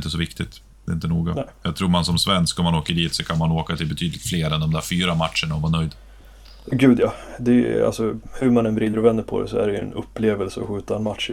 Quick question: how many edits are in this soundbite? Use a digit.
0